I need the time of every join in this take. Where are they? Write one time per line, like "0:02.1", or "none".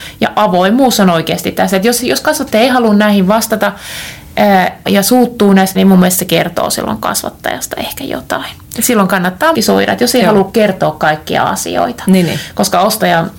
0:04.9
0:05.8
0:09.5